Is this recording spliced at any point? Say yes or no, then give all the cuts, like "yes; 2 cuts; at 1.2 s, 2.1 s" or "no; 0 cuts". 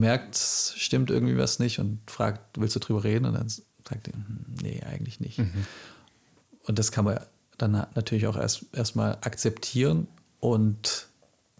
no; 0 cuts